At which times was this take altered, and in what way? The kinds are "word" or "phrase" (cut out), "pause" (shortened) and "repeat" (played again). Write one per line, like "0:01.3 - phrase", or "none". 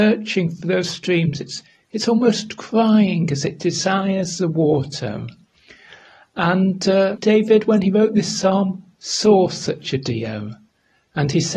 0:07.2 - word